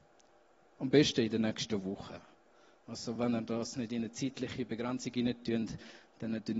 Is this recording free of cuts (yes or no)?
yes